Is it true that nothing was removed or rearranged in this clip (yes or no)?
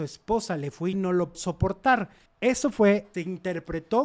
no